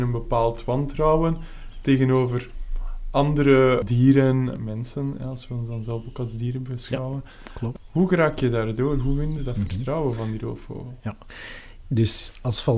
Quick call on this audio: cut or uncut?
uncut